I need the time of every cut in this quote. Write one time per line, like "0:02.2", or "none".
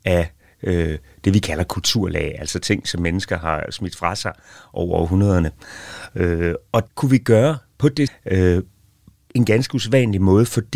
0:06.9
0:08.1
0:09.3